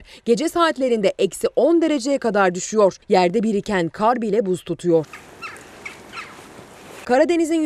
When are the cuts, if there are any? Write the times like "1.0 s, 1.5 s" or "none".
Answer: 3.0 s